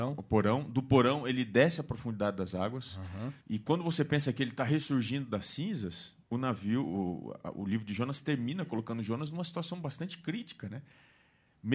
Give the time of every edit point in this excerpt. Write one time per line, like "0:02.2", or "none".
0:03.4
0:06.2